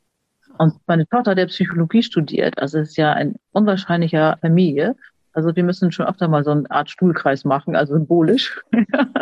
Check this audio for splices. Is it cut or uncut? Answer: cut